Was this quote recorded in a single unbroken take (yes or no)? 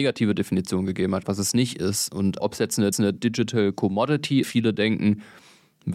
no